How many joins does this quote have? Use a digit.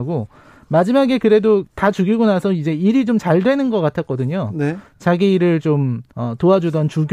1